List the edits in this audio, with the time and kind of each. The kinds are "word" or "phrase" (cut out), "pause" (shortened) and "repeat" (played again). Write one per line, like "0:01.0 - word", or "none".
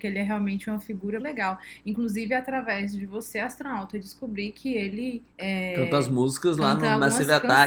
0:01.2 - word
0:05.3 - pause